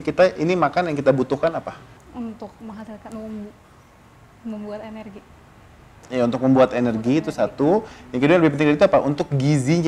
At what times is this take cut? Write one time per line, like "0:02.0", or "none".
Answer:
none